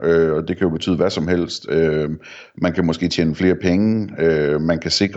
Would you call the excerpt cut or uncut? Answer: uncut